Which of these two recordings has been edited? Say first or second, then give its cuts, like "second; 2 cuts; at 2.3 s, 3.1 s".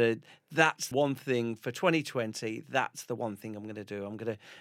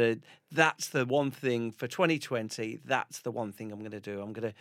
first; 1 cut; at 0.9 s